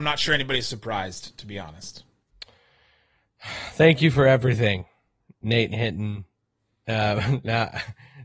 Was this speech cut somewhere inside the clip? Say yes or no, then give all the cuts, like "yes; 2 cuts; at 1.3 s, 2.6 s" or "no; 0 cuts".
no; 0 cuts